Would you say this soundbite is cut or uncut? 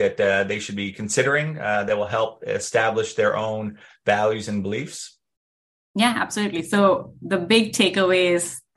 uncut